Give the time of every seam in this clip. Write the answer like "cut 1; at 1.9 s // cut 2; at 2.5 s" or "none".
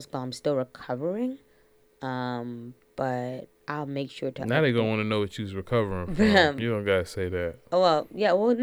none